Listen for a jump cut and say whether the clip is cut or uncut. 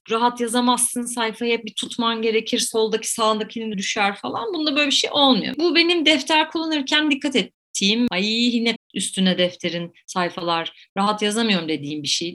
cut